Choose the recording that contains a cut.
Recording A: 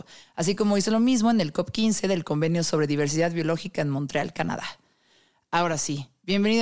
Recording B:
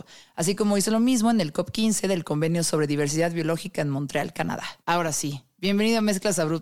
B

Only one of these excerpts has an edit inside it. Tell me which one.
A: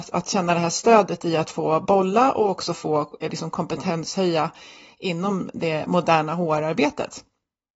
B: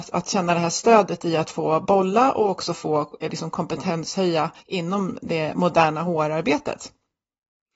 B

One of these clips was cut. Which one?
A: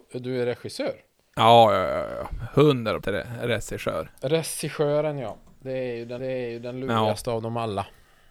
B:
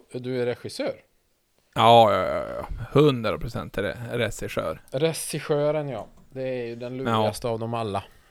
A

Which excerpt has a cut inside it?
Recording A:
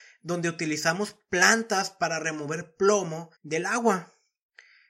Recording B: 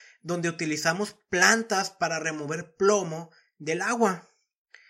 A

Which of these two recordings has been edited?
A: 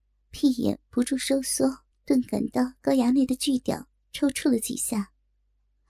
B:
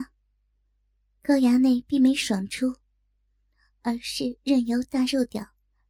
A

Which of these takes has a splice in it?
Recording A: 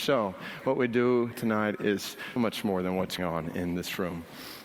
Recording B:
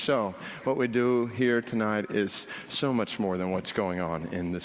A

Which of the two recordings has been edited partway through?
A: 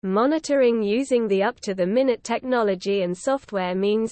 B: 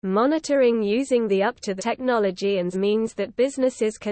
B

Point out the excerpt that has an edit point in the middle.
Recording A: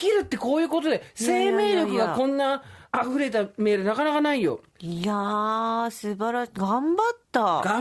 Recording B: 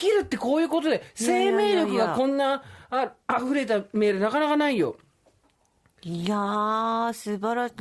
A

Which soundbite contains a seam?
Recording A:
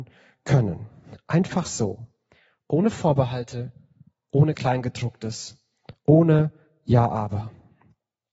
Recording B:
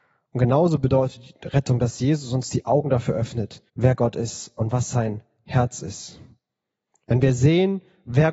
B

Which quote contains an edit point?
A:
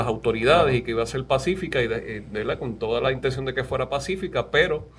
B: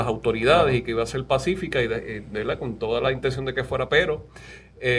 B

